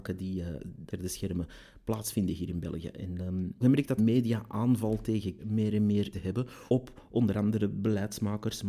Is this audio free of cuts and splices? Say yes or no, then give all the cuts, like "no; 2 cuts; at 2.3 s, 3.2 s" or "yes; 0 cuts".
no; 6 cuts; at 0.9 s, 3.6 s, 4.0 s, 5.4 s, 6.1 s, 6.7 s